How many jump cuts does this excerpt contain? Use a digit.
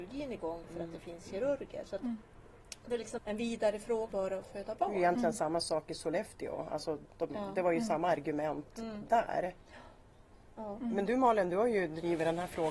2